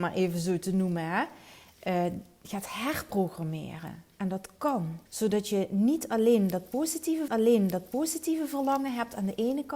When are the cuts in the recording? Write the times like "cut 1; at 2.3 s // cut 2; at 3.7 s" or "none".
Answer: cut 1; at 5.1 s // cut 2; at 7.3 s

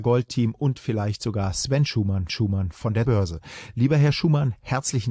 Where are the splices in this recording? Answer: cut 1; at 2.3 s // cut 2; at 3.1 s

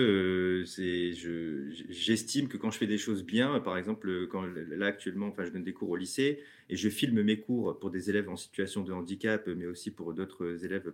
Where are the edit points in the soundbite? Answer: none

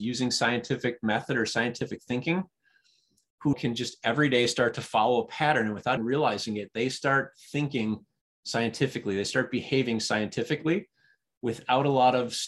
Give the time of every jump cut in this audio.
cut 1; at 3.5 s // cut 2; at 6.0 s

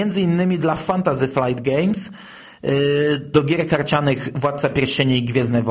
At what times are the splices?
none

